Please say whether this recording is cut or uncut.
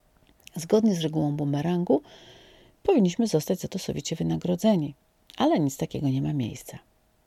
uncut